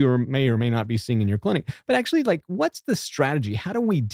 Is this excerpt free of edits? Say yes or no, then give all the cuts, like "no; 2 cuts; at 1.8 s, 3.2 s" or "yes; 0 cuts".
yes; 0 cuts